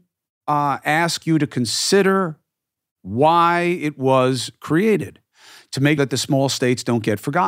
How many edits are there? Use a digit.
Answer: 1